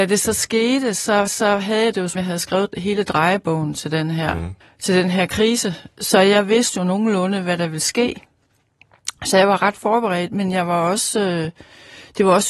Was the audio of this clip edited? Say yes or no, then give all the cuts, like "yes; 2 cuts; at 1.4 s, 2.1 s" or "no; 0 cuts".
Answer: yes; 3 cuts; at 1.3 s, 2.2 s, 4.6 s